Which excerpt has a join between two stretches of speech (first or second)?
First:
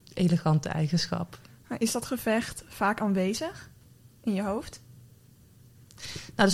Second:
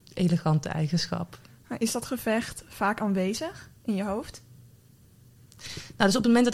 second